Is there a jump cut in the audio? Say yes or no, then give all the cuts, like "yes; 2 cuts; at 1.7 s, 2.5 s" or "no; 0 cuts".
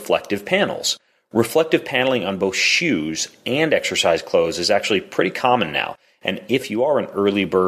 no; 0 cuts